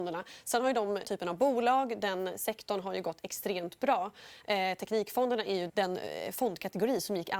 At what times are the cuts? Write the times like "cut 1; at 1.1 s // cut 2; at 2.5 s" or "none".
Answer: cut 1; at 1.0 s // cut 2; at 5.7 s